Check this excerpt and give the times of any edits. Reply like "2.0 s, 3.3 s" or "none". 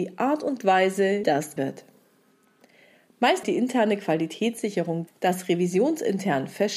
1.2 s, 1.6 s, 3.4 s, 5.1 s